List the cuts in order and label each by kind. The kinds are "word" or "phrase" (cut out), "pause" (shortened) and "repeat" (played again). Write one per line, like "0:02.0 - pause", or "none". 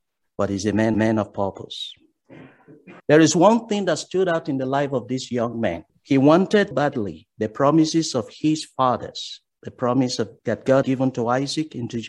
0:00.9 - repeat
0:03.0 - pause
0:05.9 - pause
0:06.7 - word
0:10.4 - pause
0:10.8 - word